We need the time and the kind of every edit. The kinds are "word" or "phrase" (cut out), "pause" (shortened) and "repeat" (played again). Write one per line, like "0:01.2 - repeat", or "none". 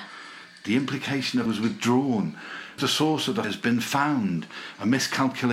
0:01.5 - word
0:02.8 - word
0:03.4 - word

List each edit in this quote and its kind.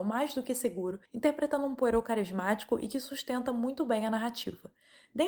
0:01.1 - pause

